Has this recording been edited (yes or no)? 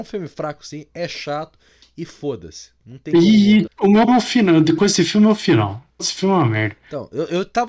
yes